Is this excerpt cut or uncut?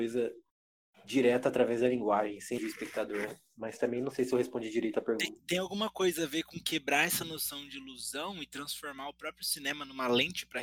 cut